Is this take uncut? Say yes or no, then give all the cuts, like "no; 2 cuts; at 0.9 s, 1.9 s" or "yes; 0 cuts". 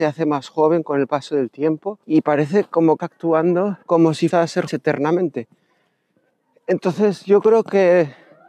no; 5 cuts; at 2.0 s, 3.0 s, 3.8 s, 4.3 s, 4.7 s